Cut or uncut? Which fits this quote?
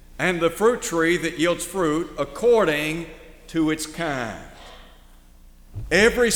uncut